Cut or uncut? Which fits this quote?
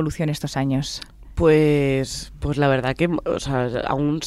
uncut